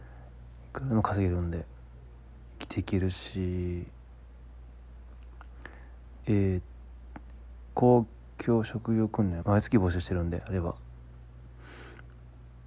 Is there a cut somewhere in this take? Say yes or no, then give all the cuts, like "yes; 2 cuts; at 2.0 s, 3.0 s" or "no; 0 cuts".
yes; 2 cuts; at 6.2 s, 9.4 s